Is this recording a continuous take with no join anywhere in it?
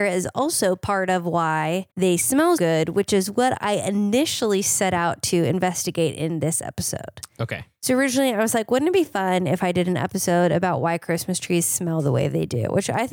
no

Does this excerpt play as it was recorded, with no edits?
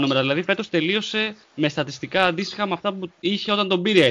no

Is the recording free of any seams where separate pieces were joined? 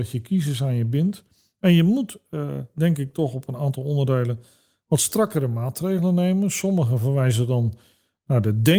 yes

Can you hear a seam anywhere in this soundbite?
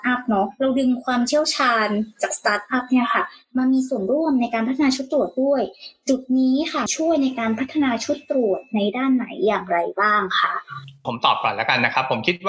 no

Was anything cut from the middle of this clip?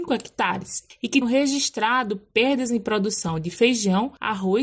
yes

